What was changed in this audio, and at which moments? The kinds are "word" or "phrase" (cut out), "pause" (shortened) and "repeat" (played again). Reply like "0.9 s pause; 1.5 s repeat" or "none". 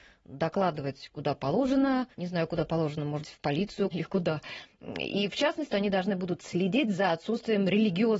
2.1 s pause; 3.2 s word; 3.9 s word; 5.7 s word